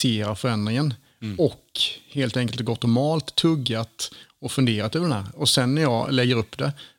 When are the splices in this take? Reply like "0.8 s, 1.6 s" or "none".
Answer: none